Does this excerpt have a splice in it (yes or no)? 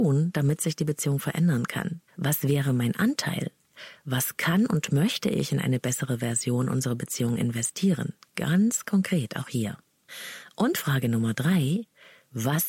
yes